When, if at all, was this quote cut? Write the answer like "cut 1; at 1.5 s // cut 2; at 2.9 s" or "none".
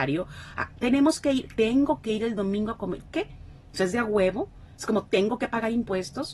cut 1; at 3.1 s